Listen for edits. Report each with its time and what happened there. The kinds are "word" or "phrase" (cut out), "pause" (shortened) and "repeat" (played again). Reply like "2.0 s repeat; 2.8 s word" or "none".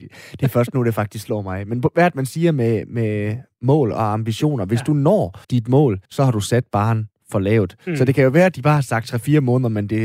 5.4 s pause; 6.1 s pause